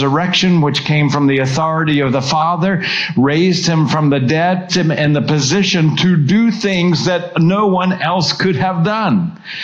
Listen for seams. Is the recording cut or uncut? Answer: cut